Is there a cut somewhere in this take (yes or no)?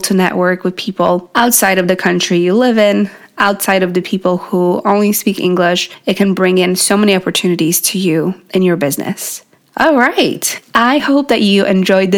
no